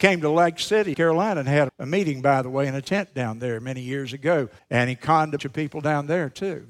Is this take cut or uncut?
cut